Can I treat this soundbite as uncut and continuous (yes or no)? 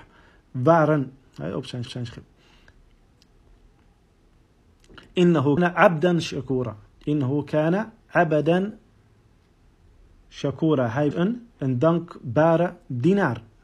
no